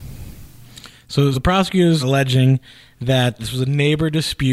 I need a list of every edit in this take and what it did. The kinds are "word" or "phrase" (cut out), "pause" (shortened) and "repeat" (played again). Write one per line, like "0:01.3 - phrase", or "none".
0:01.3 - word
0:02.0 - word
0:03.4 - word